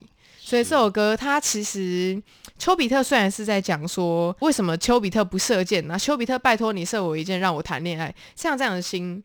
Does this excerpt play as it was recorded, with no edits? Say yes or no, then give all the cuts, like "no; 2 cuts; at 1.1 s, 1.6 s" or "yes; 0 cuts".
no; 1 cut; at 4.4 s